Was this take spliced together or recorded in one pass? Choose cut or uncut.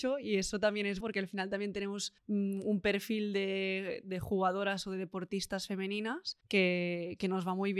cut